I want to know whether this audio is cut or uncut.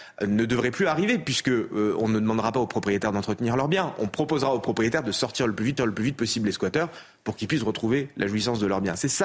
cut